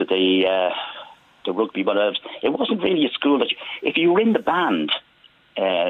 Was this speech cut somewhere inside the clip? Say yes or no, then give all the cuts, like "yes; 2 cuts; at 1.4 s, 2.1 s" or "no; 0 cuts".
no; 0 cuts